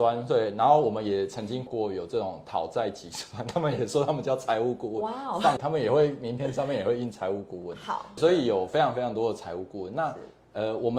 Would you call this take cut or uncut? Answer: cut